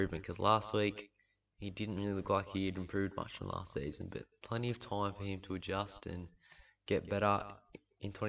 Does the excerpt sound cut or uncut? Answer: uncut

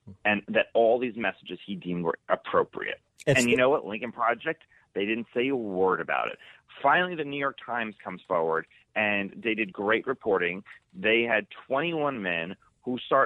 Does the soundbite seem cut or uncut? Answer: uncut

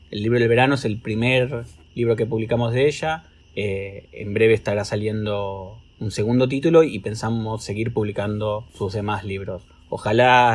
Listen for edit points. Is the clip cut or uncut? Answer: cut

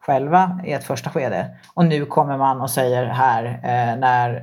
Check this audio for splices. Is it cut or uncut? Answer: uncut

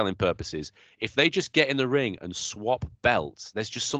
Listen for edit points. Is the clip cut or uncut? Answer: uncut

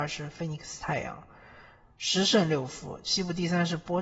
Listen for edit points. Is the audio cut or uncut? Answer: uncut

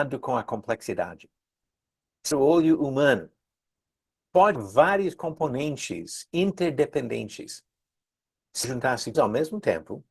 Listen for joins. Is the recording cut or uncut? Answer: cut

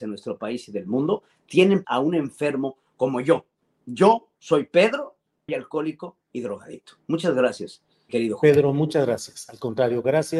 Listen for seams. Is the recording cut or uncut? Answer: cut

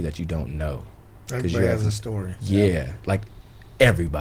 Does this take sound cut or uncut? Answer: uncut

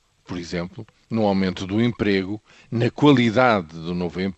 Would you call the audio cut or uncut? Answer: uncut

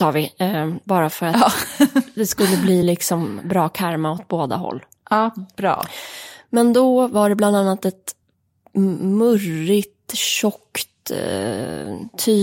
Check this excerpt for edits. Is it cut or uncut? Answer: uncut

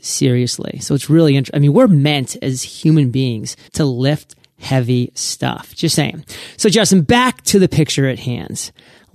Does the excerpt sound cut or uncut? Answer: cut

